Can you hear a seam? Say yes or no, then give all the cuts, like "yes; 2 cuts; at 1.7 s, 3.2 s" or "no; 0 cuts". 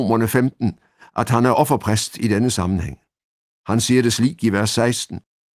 no; 0 cuts